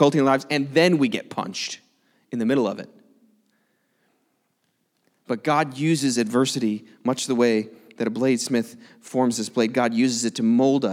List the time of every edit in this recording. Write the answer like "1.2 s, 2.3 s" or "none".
none